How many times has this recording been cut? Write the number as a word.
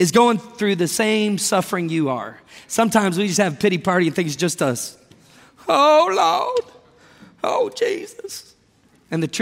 zero